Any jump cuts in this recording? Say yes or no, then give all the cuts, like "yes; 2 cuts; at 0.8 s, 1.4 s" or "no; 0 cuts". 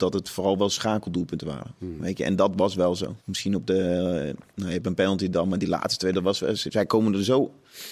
yes; 1 cut; at 3.2 s